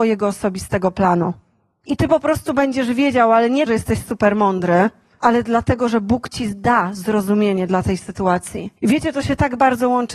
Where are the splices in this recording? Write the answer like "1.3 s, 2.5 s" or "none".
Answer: 3.7 s, 8.8 s